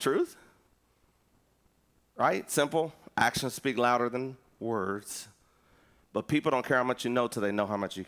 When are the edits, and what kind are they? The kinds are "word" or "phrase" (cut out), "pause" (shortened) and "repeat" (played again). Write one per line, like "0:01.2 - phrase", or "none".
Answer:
none